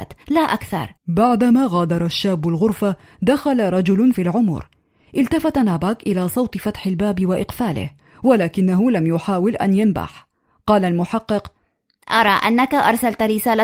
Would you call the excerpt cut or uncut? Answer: cut